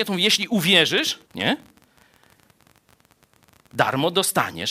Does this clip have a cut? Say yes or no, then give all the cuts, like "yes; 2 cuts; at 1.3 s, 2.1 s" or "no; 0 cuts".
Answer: yes; 1 cut; at 1.3 s